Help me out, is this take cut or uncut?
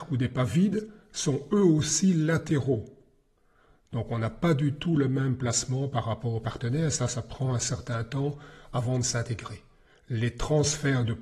uncut